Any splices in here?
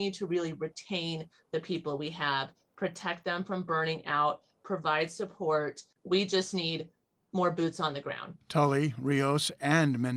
no; 0 cuts

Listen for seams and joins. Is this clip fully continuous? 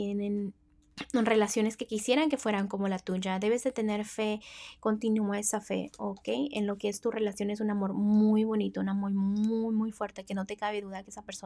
yes; 0 cuts

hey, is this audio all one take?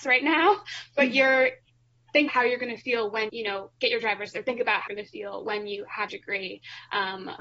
no; 5 cuts; at 2.3 s, 3.3 s, 4.3 s, 4.9 s, 6.1 s

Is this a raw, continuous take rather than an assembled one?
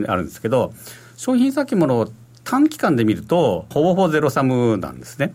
no; 1 cut; at 3.7 s

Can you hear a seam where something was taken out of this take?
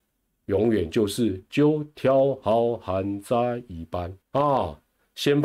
yes; 1 cut; at 4.2 s

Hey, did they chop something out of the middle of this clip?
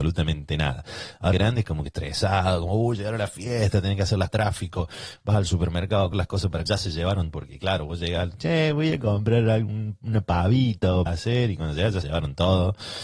yes; 9 cuts; at 1.3 s, 1.9 s, 4.3 s, 6.1 s, 6.7 s, 7.3 s, 8.3 s, 11.1 s, 12.0 s

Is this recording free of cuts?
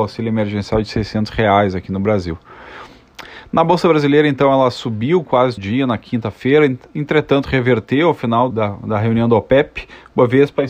no; 2 cuts; at 5.6 s, 8.5 s

